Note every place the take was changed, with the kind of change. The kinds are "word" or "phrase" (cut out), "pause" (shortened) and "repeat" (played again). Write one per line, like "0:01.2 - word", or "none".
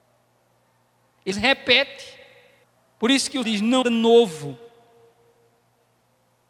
0:01.3 - word
0:02.6 - pause
0:03.4 - word
0:03.8 - phrase